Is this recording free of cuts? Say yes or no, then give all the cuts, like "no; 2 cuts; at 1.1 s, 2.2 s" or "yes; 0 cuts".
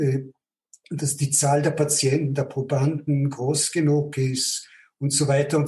yes; 0 cuts